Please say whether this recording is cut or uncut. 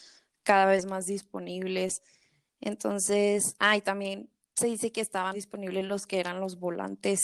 cut